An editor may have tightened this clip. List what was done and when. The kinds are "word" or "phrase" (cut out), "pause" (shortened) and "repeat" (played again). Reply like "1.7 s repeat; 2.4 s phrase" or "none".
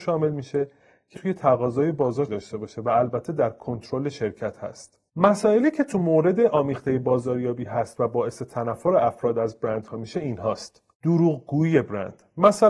1.1 s word; 2.3 s word; 5.1 s pause; 10.9 s pause